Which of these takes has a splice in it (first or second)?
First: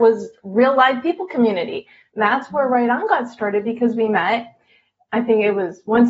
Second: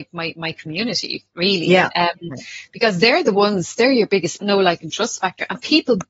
second